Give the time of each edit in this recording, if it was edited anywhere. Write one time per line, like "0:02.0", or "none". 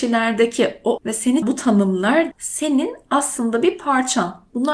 0:01.0
0:01.4
0:02.3